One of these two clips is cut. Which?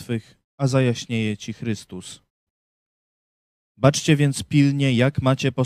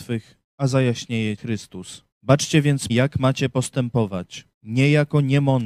second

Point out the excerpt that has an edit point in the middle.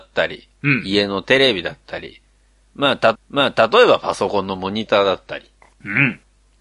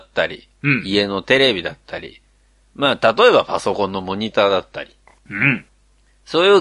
first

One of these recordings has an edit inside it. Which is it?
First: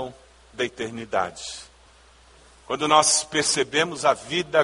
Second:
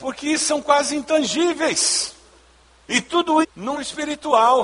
second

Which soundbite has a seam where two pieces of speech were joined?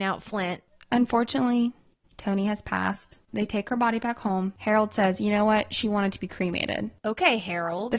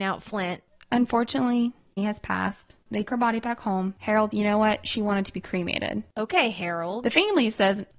second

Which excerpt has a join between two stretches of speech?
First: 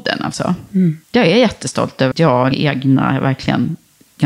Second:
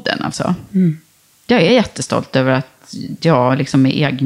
first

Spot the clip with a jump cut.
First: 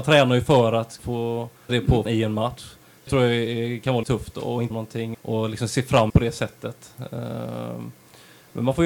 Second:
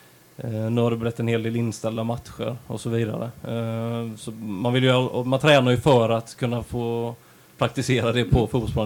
first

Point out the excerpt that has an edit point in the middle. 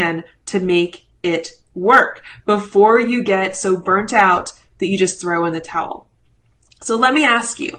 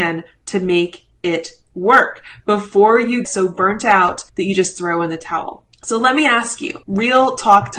second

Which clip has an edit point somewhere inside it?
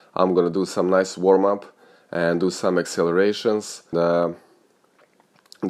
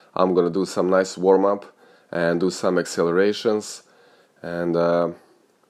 first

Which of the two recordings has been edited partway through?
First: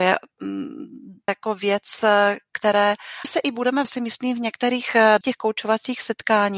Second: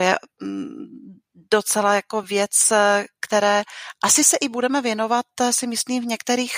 first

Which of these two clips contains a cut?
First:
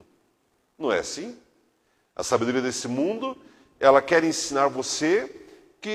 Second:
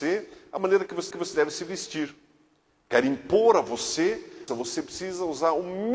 second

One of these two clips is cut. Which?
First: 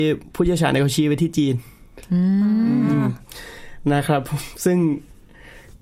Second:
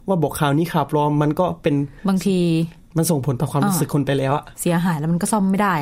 second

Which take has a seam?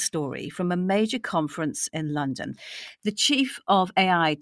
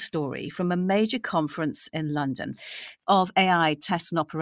second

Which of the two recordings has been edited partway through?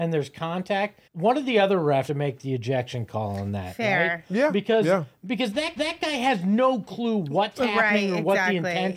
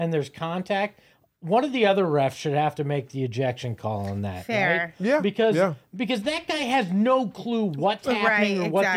first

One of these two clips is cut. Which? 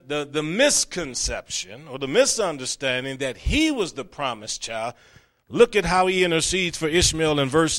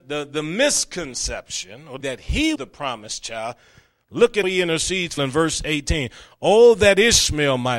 second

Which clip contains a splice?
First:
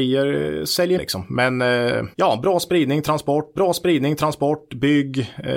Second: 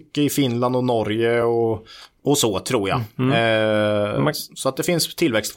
first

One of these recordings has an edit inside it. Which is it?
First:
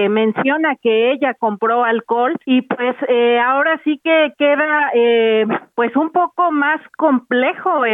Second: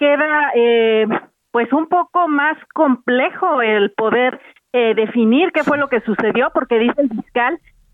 first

